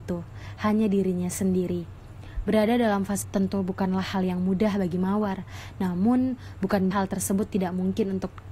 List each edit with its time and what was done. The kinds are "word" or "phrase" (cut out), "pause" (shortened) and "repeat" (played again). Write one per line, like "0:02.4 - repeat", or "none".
0:03.2 - word
0:06.9 - word